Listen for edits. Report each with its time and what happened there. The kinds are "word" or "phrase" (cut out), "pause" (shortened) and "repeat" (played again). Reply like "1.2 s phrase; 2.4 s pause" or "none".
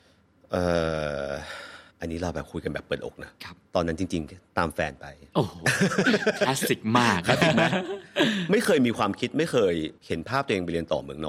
1.9 s pause; 3.7 s pause; 10.0 s pause